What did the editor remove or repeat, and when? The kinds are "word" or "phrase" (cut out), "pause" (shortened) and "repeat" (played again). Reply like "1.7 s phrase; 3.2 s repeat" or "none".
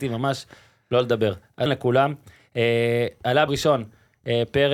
1.7 s word; 3.5 s word